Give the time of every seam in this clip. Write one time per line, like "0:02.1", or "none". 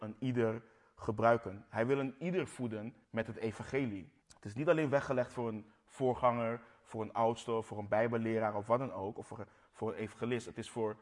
0:03.0
0:04.2